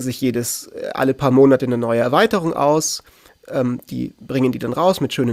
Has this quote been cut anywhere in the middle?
no; 0 cuts

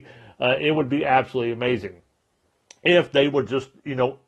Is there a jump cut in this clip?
no; 0 cuts

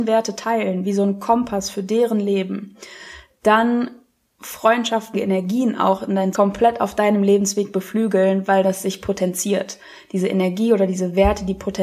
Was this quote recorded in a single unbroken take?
no; 3 cuts; at 4.3 s, 5.1 s, 6.3 s

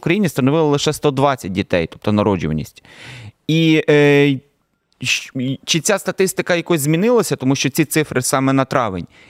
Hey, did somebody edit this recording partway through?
no; 0 cuts

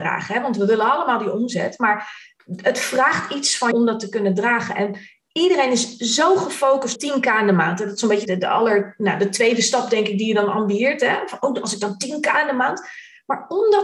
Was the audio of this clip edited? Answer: yes; 3 cuts; at 3.7 s, 7.0 s, 8.3 s

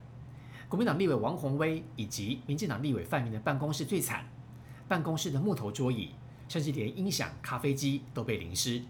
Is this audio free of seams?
no; 1 cut; at 4.8 s

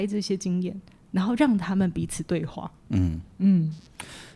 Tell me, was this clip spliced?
no; 0 cuts

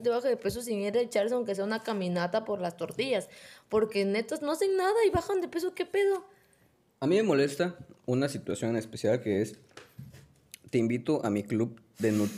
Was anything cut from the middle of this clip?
no; 0 cuts

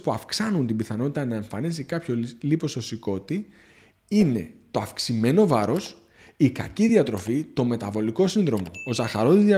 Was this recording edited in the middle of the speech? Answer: no; 0 cuts

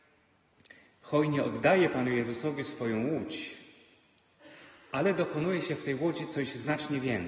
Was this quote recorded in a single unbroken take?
yes; 0 cuts

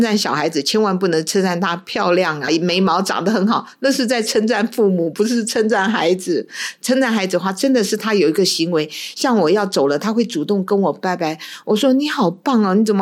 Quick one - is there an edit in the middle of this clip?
yes; 1 cut; at 2.5 s

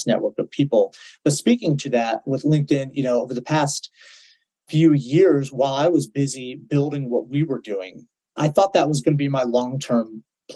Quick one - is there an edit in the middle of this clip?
no; 0 cuts

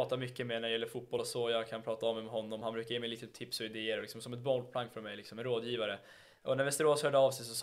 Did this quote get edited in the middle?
no; 0 cuts

